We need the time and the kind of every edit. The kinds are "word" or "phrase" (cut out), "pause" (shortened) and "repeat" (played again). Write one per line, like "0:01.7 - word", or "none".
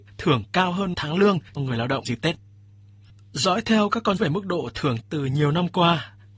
0:00.9 - word
0:01.6 - word
0:02.0 - word
0:04.2 - word
0:05.0 - word